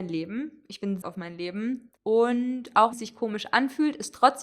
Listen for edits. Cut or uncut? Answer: cut